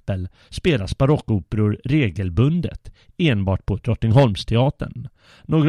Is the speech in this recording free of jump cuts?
yes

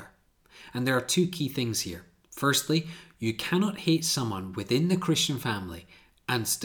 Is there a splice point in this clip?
no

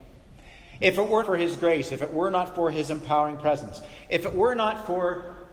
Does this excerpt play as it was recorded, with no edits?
no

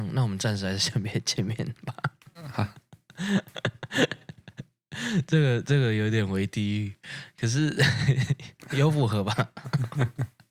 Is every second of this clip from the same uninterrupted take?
yes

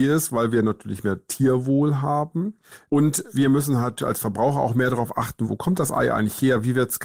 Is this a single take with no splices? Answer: yes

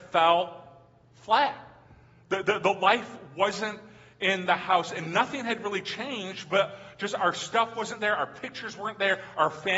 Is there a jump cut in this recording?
no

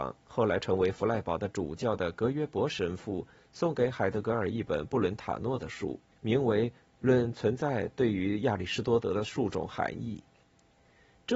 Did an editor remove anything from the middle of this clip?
yes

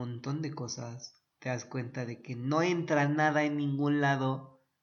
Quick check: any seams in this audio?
yes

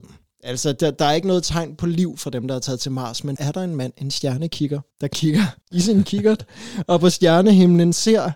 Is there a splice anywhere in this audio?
yes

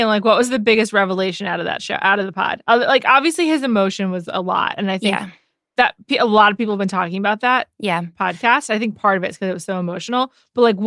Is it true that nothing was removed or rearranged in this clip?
yes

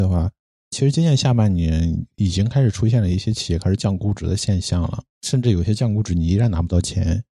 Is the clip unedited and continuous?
no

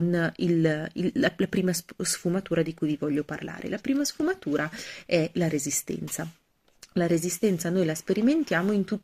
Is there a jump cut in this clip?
no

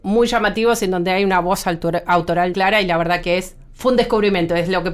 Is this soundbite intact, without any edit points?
no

